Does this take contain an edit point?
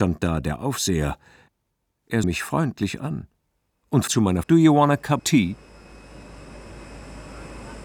yes; 4 cuts; at 2.2 s, 4.1 s, 4.4 s, 5.2 s

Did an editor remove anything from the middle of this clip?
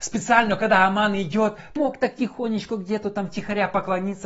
yes; 1 cut; at 1.8 s

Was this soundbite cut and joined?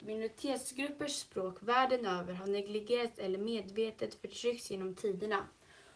no; 0 cuts

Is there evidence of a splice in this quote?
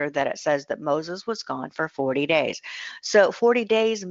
no; 0 cuts

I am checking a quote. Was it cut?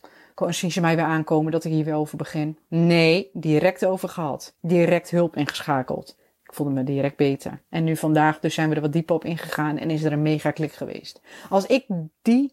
yes; 2 cuts; at 4.6 s, 7.6 s

